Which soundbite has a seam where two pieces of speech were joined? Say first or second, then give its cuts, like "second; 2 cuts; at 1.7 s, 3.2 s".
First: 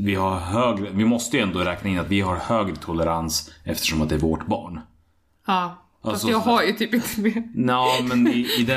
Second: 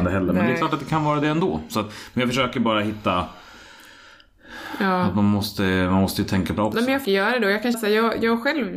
second; 3 cuts; at 6.6 s, 7.0 s, 7.7 s